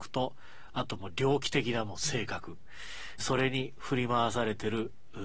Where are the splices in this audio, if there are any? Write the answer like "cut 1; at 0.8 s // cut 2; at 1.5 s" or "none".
cut 1; at 3.2 s